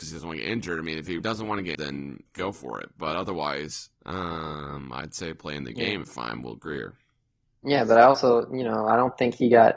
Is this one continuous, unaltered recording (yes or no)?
no